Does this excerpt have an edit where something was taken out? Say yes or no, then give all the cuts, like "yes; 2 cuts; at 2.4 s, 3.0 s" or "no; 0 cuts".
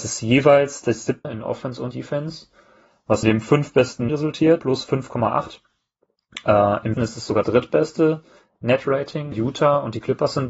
yes; 8 cuts; at 1.2 s, 1.9 s, 3.2 s, 4.1 s, 4.6 s, 6.9 s, 7.4 s, 9.3 s